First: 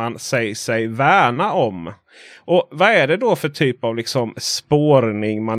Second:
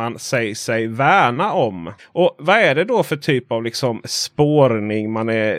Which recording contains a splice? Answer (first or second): second